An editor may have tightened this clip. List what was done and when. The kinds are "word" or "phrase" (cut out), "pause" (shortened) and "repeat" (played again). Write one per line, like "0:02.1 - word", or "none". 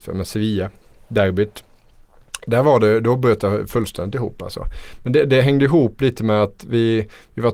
none